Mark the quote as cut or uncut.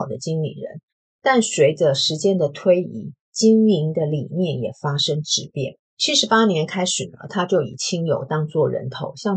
cut